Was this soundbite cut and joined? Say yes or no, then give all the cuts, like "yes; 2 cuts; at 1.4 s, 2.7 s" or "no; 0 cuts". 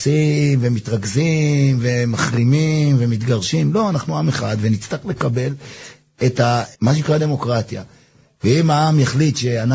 yes; 2 cuts; at 6.7 s, 7.2 s